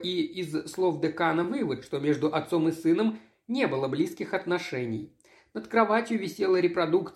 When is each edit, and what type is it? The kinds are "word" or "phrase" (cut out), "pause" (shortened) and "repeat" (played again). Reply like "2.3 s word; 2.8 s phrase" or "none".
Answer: none